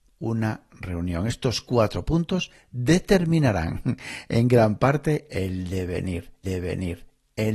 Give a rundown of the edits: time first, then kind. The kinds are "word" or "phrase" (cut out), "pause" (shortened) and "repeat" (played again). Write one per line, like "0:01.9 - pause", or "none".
0:06.4 - repeat